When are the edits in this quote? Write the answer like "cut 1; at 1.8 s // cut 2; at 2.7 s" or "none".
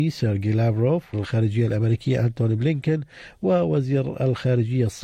cut 1; at 1.1 s